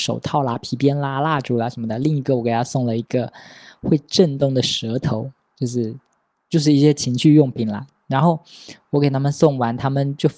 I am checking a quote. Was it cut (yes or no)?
no